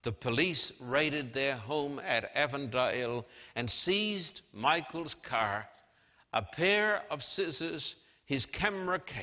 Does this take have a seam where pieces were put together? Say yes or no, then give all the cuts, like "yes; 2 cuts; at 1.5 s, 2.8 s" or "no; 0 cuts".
no; 0 cuts